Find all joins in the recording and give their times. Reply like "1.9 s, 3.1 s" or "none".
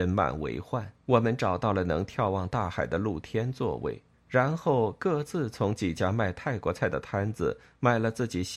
1.0 s, 4.1 s